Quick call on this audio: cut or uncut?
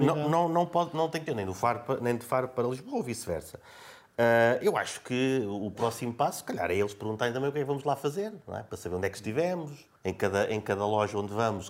cut